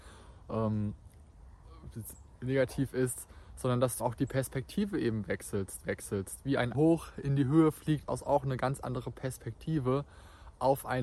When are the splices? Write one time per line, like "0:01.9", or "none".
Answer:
0:04.0
0:05.8
0:06.7
0:08.1